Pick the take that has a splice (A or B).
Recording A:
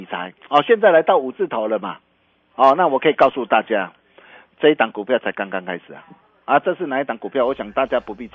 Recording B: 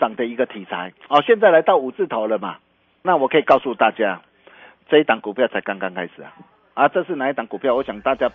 B